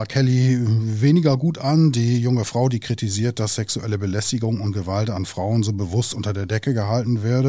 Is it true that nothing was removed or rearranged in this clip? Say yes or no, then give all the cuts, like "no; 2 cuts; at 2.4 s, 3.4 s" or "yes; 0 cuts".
yes; 0 cuts